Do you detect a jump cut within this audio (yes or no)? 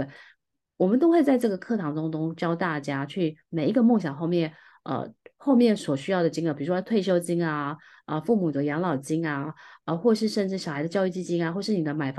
no